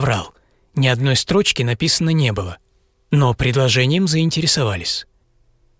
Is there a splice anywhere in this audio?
no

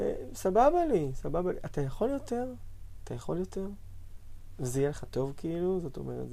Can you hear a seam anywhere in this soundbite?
no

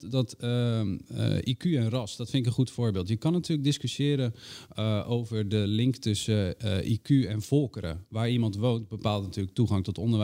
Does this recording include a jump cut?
no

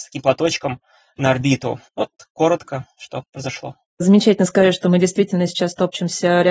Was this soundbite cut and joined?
yes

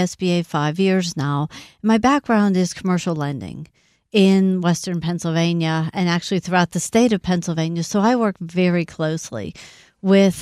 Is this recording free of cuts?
yes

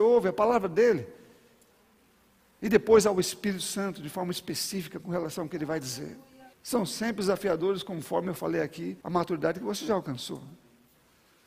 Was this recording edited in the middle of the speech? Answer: yes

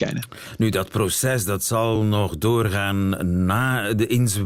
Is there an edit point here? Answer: no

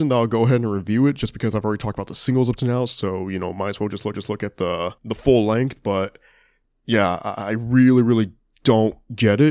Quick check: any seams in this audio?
yes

